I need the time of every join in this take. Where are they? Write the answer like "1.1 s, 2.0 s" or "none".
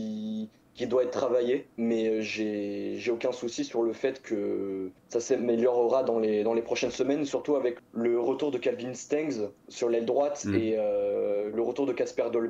1.7 s, 5.0 s, 7.8 s